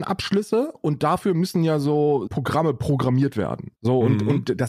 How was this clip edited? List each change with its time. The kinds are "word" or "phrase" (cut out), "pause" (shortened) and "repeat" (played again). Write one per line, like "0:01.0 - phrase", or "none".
0:02.3 - word
0:03.8 - pause